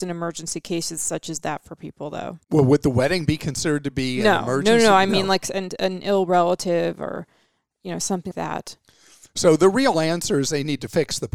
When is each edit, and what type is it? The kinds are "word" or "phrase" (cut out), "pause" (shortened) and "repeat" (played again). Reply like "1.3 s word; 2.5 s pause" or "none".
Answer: 2.4 s pause; 8.3 s word